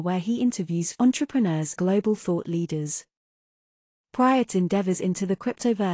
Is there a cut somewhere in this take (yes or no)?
yes